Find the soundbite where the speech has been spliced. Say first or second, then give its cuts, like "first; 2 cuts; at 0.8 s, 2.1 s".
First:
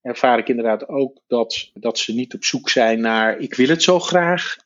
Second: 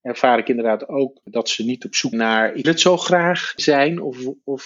second; 4 cuts; at 1.2 s, 2.1 s, 2.6 s, 3.6 s